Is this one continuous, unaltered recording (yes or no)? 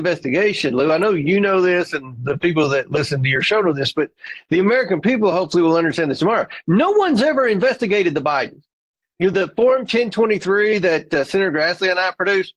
yes